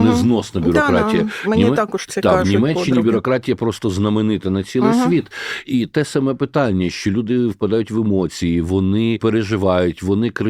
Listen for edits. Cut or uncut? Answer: uncut